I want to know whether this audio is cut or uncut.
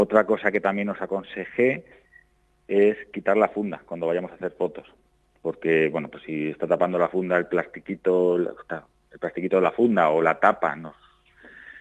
uncut